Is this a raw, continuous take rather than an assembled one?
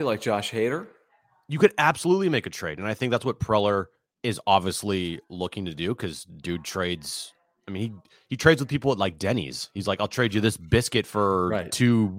yes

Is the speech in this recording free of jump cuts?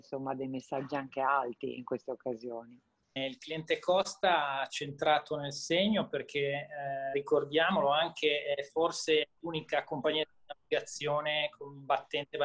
no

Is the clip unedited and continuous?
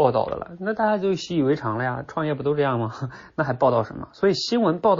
yes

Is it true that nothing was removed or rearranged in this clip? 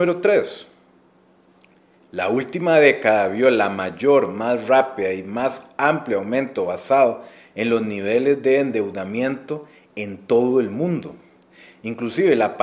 yes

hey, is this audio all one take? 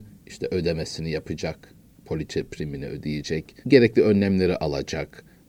no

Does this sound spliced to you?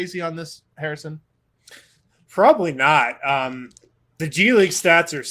yes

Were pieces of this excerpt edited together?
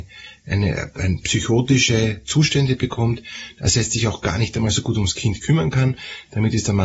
no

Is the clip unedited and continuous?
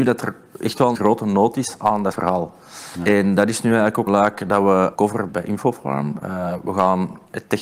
no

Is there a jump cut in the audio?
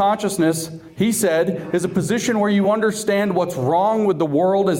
no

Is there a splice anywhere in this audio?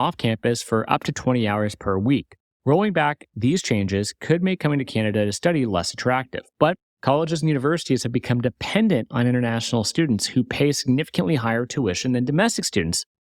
no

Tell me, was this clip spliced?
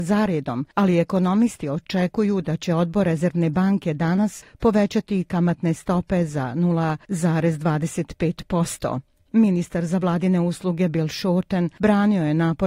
no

